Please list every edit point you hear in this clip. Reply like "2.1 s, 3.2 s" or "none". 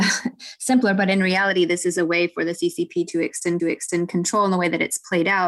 3.6 s